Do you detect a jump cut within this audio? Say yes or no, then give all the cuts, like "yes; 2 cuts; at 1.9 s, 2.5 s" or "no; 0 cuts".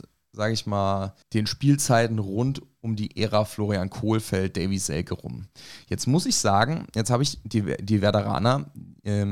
yes; 1 cut; at 1.2 s